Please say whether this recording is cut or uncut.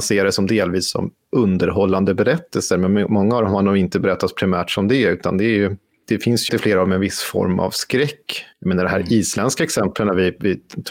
cut